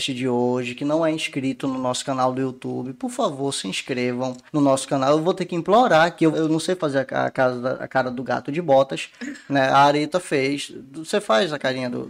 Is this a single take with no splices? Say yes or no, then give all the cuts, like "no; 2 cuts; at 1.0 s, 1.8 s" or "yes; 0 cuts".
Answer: no; 2 cuts; at 4.5 s, 6.3 s